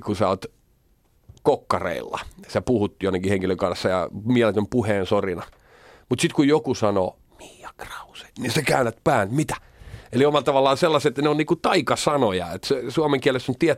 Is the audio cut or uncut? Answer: uncut